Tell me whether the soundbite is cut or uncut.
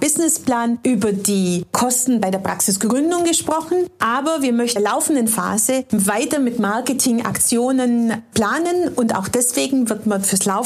cut